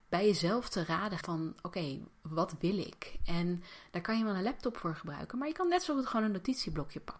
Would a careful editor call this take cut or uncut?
cut